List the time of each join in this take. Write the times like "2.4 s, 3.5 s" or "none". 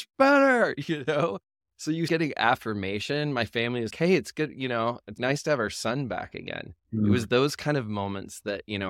2.1 s, 3.9 s, 5.2 s